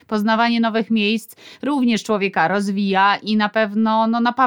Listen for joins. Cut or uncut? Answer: uncut